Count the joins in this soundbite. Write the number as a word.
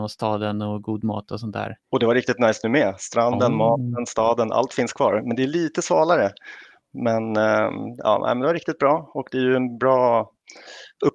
zero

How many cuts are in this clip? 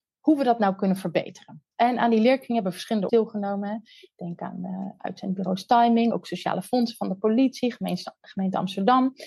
three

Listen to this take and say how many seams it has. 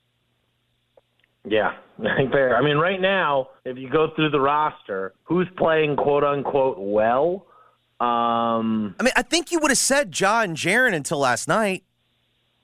three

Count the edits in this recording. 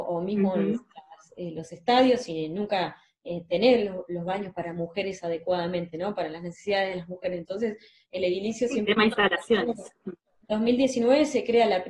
zero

